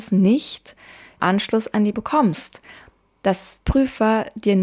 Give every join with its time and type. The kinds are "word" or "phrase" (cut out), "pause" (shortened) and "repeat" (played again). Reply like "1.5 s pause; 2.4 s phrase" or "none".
1.2 s word; 1.9 s word; 3.7 s word